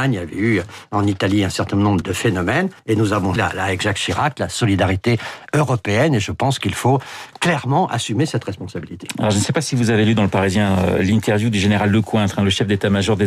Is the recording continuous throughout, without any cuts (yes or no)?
no